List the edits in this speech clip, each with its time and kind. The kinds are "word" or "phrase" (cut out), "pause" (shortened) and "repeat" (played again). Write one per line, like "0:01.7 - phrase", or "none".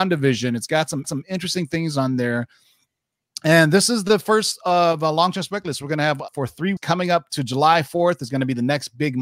0:01.0 - repeat
0:06.3 - word
0:06.8 - word